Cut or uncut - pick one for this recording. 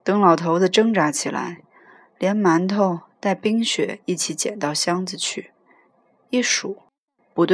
uncut